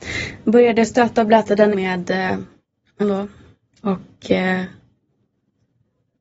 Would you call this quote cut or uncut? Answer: cut